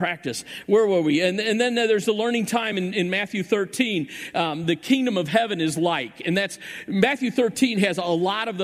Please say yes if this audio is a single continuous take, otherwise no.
yes